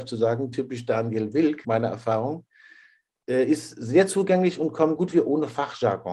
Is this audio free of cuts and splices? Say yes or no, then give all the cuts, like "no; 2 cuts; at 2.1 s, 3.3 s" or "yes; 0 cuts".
no; 2 cuts; at 1.6 s, 5.0 s